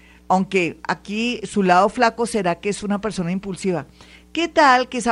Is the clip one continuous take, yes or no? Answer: yes